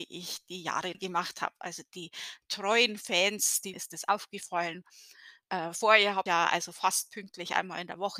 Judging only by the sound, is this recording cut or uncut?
cut